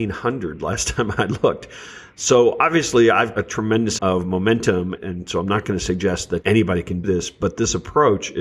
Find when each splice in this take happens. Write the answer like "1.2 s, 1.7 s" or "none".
3.3 s, 4.0 s, 5.0 s, 6.4 s, 7.0 s